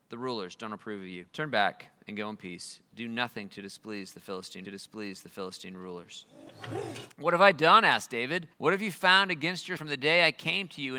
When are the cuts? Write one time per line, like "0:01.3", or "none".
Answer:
0:01.3
0:04.6
0:08.5
0:09.8